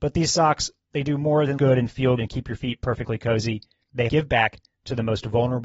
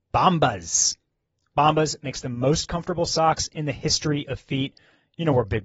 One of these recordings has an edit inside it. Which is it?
first; 3 cuts; at 1.6 s, 2.2 s, 4.1 s

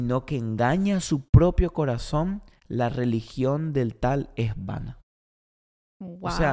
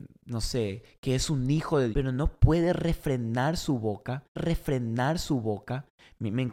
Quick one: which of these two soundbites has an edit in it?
second; 2 cuts; at 1.9 s, 4.4 s

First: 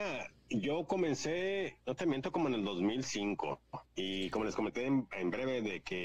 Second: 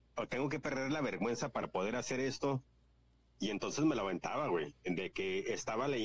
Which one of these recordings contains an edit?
first; 2 cuts; at 1.8 s, 3.8 s

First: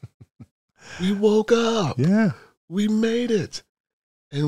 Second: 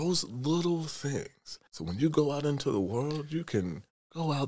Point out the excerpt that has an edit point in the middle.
second; 1 cut; at 1.7 s

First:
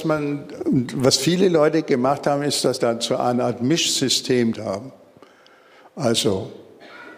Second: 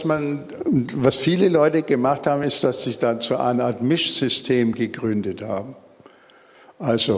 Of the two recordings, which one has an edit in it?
first; 2 cuts; at 2.8 s, 4.5 s

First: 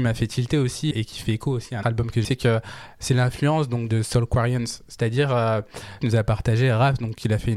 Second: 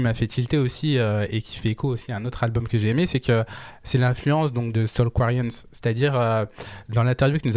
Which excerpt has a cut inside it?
first; 4 cuts; at 0.9 s, 1.8 s, 2.2 s, 6.0 s

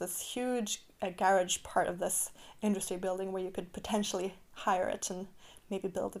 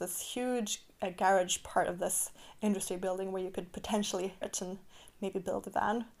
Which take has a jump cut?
second; 1 cut; at 4.4 s

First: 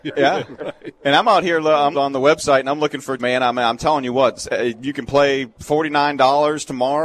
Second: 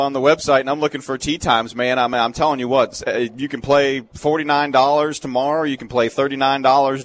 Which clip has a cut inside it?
first; 2 cuts; at 1.9 s, 3.2 s

